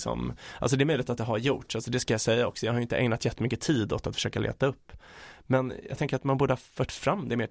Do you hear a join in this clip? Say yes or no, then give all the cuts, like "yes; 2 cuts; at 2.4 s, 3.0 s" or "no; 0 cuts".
no; 0 cuts